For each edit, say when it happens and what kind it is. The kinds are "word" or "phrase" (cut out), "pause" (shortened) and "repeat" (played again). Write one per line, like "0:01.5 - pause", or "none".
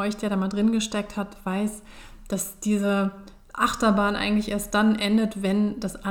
none